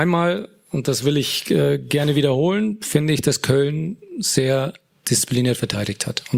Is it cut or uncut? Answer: uncut